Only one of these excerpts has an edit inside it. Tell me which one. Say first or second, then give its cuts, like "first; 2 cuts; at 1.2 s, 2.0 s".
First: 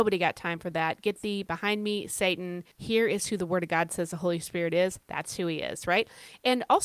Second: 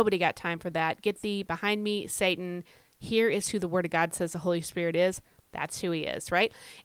first; 2 cuts; at 2.7 s, 5.0 s